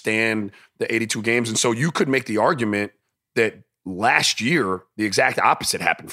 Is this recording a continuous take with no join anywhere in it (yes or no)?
yes